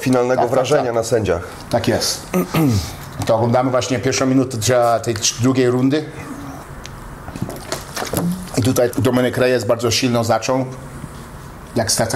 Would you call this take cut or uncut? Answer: cut